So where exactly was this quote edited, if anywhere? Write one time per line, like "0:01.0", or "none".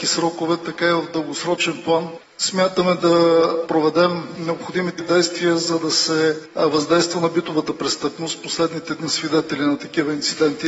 0:05.0
0:09.0